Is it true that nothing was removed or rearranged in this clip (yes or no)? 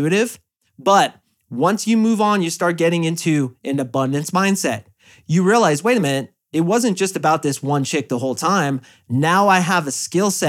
yes